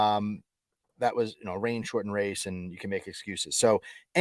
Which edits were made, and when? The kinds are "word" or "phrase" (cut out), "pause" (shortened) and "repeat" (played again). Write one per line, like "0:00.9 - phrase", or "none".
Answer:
none